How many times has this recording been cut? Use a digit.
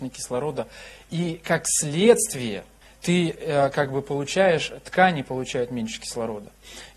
1